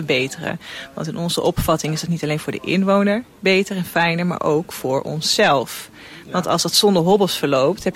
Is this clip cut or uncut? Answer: uncut